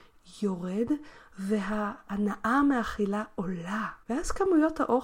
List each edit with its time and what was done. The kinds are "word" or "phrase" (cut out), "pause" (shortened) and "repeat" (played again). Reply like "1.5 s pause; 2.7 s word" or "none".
4.0 s pause